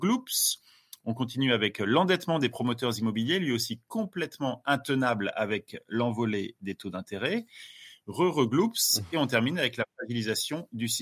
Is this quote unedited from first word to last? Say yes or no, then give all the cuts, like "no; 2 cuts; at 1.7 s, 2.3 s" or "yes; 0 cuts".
yes; 0 cuts